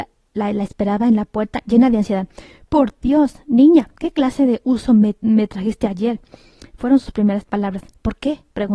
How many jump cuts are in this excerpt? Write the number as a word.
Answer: zero